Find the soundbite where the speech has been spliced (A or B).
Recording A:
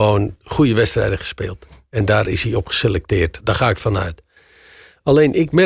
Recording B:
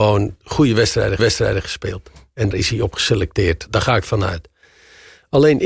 B